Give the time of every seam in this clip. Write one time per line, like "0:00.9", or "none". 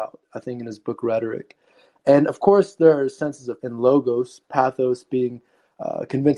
0:03.6